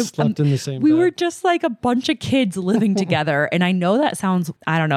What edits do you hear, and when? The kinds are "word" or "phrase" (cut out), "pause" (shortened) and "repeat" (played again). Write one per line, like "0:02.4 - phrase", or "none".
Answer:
none